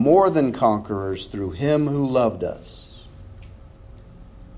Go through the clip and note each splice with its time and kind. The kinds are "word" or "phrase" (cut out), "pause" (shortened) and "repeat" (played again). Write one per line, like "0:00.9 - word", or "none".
none